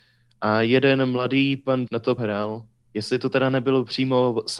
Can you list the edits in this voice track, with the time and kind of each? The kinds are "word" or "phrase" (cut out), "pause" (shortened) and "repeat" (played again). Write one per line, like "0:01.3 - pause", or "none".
0:01.9 - word
0:02.2 - word